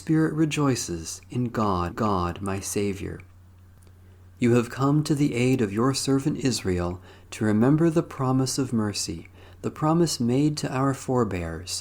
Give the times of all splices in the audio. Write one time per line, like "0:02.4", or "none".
0:01.9